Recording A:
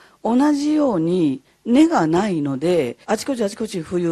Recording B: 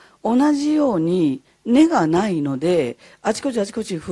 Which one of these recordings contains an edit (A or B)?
A